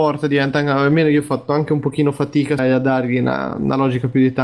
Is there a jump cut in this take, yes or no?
yes